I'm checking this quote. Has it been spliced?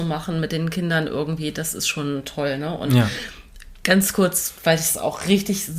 no; 0 cuts

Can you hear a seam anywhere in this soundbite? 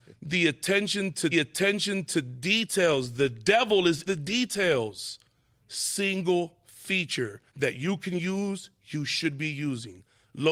yes; 4 cuts; at 1.3 s, 4.1 s, 5.6 s, 7.5 s

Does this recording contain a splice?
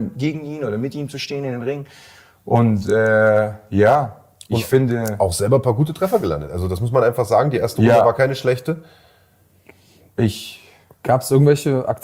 no; 0 cuts

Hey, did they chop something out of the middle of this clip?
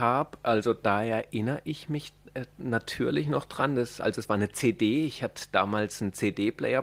no; 0 cuts

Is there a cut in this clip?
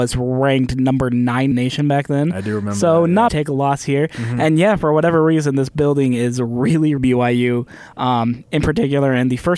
yes; 3 cuts; at 1.5 s, 3.3 s, 7.0 s

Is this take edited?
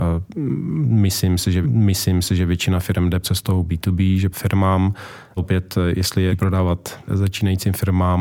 yes; 6 cuts; at 1.6 s, 3.2 s, 4.3 s, 5.4 s, 6.3 s, 7.1 s

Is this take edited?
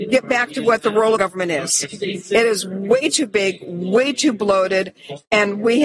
yes; 1 cut; at 1.2 s

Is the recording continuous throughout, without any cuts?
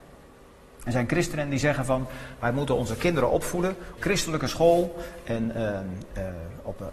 no; 1 cut; at 4.0 s

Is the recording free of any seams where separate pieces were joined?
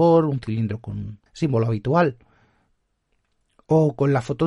no; 1 cut; at 1.3 s

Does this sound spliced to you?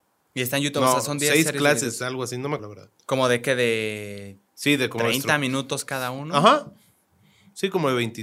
yes; 2 cuts; at 2.6 s, 4.5 s

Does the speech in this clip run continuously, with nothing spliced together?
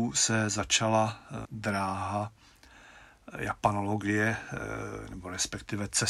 no; 1 cut; at 1.4 s

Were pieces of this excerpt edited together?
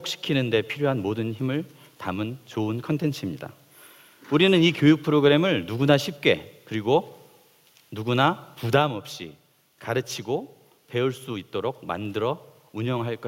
no; 0 cuts

